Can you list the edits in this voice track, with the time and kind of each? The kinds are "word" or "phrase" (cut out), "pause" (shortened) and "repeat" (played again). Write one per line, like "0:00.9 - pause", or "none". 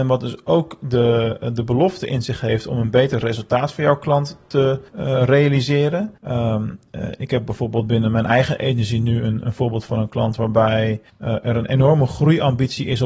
0:04.9 - pause
0:06.2 - pause
0:11.1 - pause